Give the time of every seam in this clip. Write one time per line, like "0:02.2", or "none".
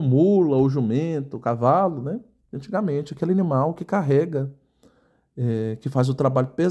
none